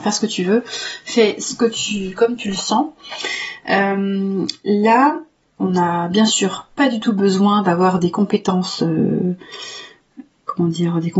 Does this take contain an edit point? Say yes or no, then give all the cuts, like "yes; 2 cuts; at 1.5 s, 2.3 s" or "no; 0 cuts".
no; 0 cuts